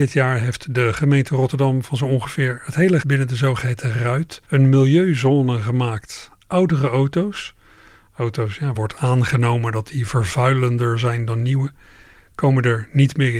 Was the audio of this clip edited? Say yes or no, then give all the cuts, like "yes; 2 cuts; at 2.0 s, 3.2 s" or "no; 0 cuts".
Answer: yes; 3 cuts; at 3.0 s, 4.4 s, 8.7 s